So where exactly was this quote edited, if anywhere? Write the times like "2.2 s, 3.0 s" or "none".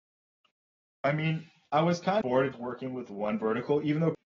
2.2 s, 2.5 s